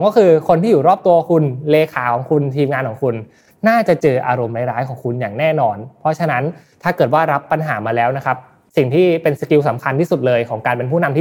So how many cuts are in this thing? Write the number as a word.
zero